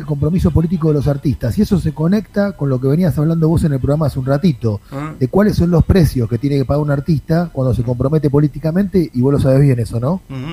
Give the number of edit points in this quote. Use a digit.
0